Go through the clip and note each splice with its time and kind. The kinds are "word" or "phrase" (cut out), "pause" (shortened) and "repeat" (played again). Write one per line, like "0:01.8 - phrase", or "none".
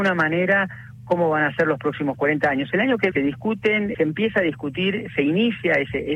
0:03.1 - word
0:03.9 - word